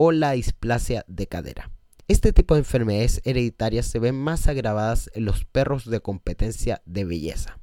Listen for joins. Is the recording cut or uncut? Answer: cut